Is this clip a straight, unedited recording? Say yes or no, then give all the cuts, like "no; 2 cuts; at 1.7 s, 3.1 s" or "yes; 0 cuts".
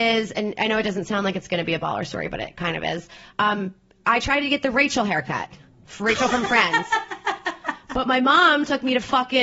yes; 0 cuts